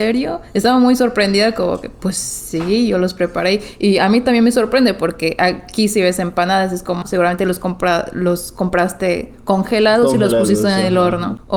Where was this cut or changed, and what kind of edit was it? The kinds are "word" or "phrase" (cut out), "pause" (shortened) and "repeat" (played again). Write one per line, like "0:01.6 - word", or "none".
0:07.0 - word